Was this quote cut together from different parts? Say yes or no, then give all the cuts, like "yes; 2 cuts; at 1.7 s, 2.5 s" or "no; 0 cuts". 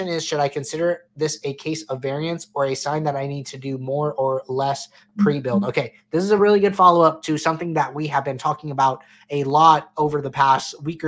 no; 0 cuts